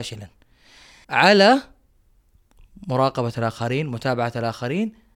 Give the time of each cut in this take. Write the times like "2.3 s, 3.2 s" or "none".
1.0 s

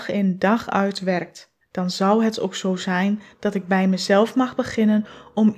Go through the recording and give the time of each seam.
1.6 s

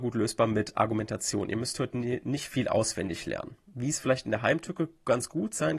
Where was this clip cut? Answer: 3.7 s

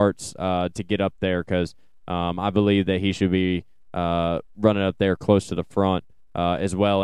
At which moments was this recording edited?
none

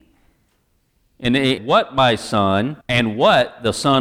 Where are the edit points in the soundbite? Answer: 1.6 s, 2.8 s

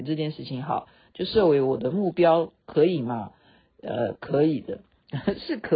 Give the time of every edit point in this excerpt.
none

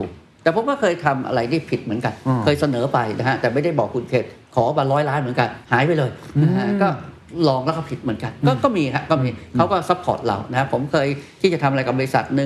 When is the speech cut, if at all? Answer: 5.6 s

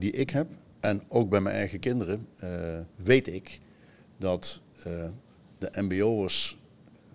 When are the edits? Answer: 2.9 s

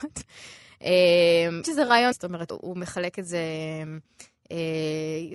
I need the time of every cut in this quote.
1.6 s, 2.1 s, 2.5 s

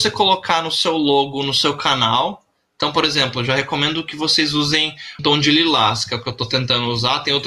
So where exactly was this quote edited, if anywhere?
5.2 s

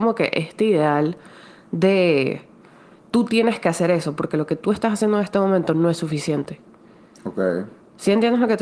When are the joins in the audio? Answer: none

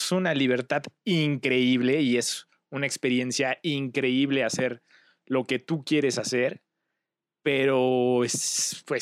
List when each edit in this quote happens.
none

